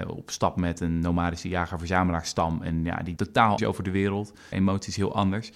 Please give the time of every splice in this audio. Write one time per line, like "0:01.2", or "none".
0:03.2
0:03.6
0:04.5

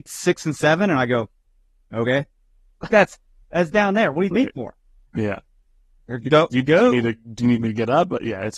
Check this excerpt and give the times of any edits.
0:02.9
0:04.3

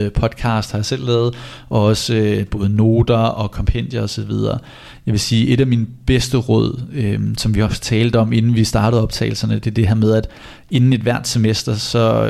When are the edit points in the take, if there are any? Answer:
none

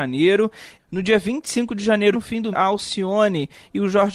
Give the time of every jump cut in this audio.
0:02.1
0:02.5

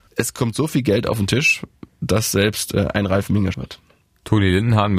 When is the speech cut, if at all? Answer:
0:03.5

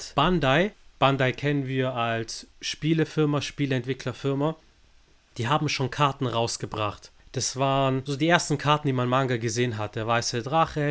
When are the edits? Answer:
0:02.5

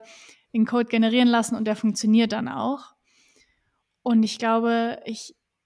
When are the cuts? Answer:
none

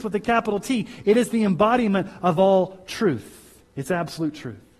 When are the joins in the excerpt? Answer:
none

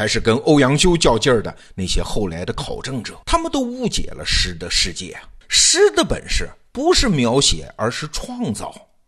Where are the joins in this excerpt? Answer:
0:03.2
0:05.4

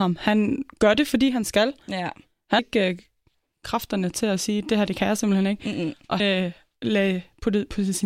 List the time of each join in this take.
0:02.6
0:06.2

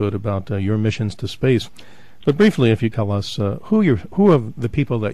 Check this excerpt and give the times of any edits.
0:02.9

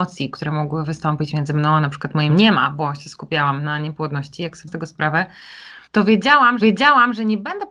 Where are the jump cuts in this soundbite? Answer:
0:02.3
0:04.7
0:05.9
0:06.6

